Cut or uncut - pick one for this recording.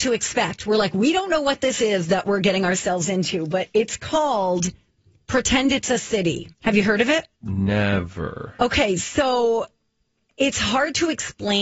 cut